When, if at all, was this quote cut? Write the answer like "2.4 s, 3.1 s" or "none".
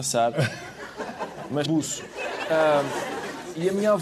1.7 s